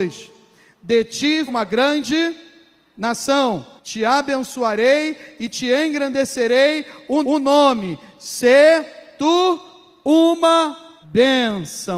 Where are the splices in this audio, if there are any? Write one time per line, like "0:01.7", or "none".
0:01.5
0:03.8
0:07.2
0:11.0